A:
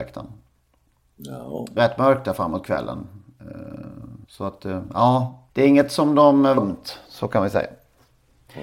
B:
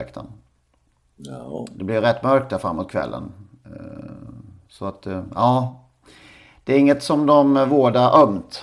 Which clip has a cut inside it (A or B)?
A